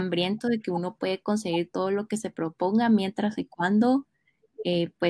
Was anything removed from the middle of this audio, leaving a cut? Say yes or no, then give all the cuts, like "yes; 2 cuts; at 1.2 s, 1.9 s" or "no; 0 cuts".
no; 0 cuts